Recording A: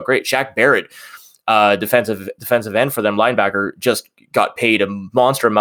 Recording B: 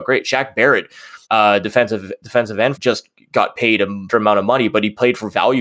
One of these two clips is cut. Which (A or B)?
B